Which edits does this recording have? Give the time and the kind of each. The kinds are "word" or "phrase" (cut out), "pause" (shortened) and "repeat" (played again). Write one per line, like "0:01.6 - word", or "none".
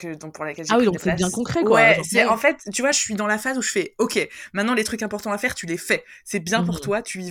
none